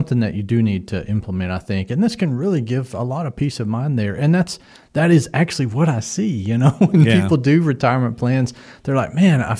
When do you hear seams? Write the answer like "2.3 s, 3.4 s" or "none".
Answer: none